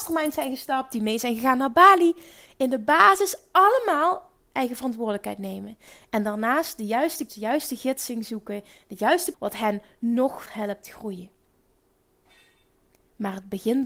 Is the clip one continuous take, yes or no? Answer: no